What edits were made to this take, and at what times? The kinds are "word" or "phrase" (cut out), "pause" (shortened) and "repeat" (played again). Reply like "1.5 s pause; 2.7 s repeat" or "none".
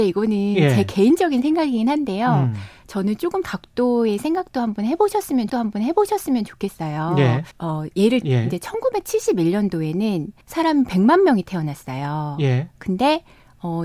3.4 s word; 5.5 s repeat; 7.5 s pause; 8.2 s word; 10.4 s pause